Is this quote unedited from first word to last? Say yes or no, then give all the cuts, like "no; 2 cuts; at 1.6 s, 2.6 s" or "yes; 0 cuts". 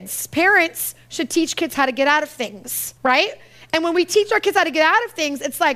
no; 1 cut; at 3.0 s